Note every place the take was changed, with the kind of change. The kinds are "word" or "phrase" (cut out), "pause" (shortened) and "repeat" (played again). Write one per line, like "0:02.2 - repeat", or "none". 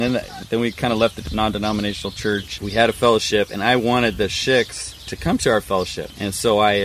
none

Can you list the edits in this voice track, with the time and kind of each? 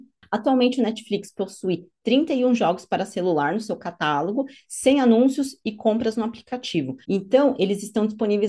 0:07.0 - pause

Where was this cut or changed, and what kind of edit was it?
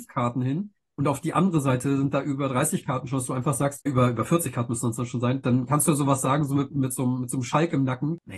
0:03.9 - word

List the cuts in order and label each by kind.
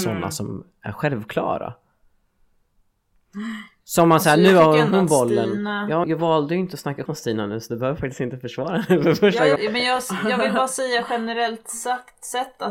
0:06.0 - word
0:07.1 - word
0:09.6 - word

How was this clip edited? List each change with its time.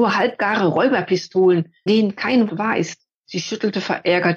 0:01.9 - word
0:02.5 - word
0:03.1 - pause

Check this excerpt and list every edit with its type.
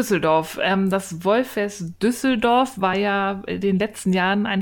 none

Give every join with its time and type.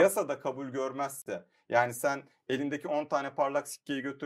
none

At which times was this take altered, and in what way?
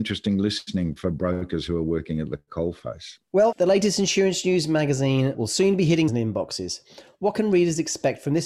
0:01.0 - word
0:03.5 - word
0:05.3 - word
0:06.1 - word

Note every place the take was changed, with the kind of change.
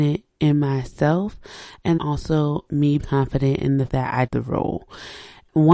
0:02.0 - word
0:03.0 - word
0:03.9 - word
0:04.3 - word

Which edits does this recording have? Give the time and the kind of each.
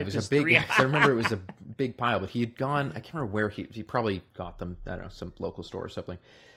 0:04.3 - pause

